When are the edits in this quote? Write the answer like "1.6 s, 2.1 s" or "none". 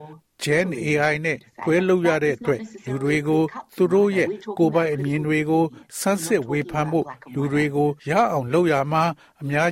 8.0 s